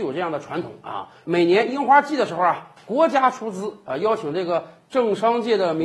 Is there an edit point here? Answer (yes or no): no